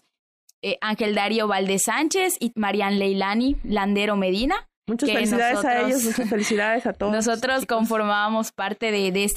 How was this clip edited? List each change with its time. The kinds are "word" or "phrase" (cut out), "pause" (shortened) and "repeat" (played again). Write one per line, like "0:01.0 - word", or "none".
0:02.5 - word